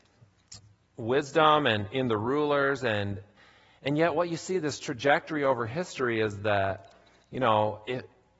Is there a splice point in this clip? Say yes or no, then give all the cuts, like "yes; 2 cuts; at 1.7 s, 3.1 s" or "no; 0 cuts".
no; 0 cuts